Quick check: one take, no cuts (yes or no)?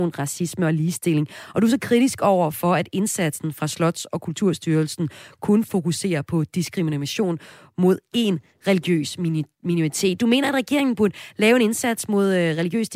yes